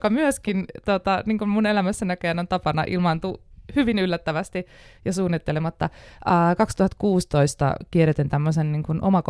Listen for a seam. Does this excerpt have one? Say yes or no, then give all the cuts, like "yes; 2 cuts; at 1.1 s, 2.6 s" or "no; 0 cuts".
no; 0 cuts